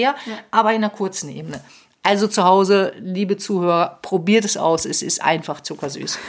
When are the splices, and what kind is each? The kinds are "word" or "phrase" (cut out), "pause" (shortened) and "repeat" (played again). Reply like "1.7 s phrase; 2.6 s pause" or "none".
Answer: none